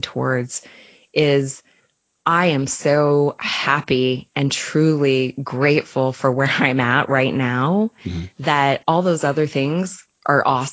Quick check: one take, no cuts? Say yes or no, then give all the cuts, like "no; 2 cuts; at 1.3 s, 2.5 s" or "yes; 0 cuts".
yes; 0 cuts